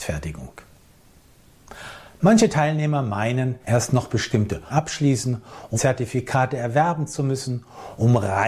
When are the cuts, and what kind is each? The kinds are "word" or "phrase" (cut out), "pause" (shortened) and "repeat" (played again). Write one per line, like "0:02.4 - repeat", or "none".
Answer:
0:03.6 - pause
0:04.7 - word
0:05.7 - word